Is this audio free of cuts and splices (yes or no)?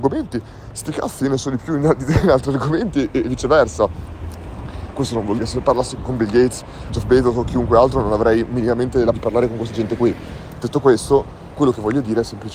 no